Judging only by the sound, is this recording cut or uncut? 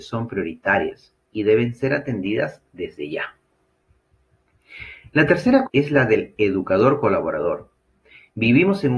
cut